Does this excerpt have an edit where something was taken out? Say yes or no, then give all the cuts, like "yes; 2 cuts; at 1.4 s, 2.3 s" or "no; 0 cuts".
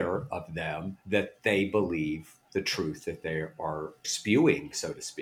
yes; 1 cut; at 1.0 s